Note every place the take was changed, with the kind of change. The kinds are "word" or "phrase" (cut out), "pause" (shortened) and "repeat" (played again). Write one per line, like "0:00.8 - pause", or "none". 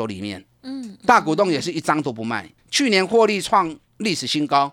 0:02.6 - pause